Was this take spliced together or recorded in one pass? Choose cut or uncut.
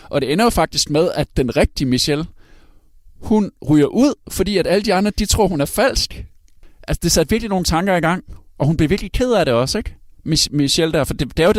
uncut